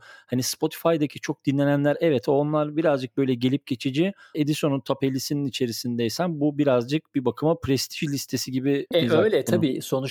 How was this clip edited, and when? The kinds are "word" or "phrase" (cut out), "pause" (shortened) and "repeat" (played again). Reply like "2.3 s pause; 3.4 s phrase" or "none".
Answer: 4.3 s phrase; 8.9 s word